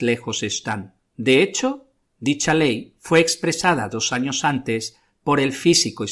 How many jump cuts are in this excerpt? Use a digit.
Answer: 1